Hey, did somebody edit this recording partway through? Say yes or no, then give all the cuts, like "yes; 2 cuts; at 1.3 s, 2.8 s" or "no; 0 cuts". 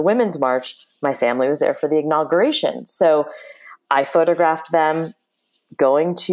no; 0 cuts